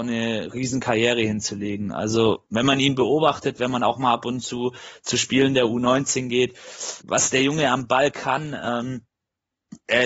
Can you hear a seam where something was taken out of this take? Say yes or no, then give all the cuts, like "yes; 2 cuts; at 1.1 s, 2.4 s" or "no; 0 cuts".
yes; 2 cuts; at 2.5 s, 7.0 s